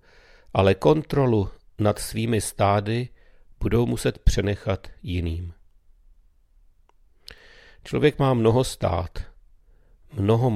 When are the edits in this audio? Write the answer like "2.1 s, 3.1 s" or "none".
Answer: none